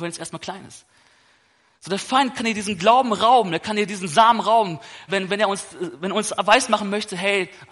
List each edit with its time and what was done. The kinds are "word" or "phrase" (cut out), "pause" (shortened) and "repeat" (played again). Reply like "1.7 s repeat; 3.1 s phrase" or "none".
5.1 s word